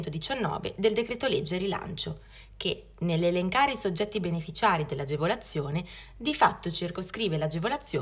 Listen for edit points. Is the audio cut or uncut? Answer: uncut